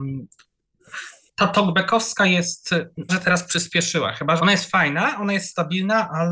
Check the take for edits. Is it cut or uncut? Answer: cut